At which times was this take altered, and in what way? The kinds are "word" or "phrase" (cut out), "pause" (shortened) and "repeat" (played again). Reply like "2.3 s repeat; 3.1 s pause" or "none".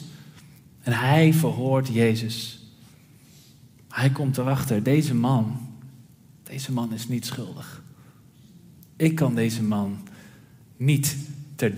none